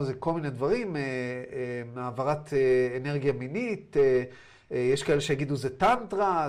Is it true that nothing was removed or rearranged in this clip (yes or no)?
yes